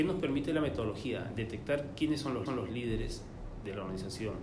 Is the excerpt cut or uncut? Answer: cut